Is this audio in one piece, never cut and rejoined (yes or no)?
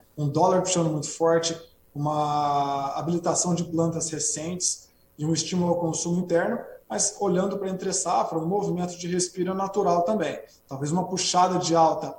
yes